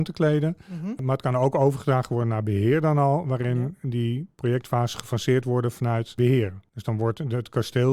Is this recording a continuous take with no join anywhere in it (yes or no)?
yes